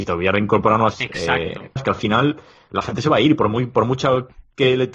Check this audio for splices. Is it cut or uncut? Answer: cut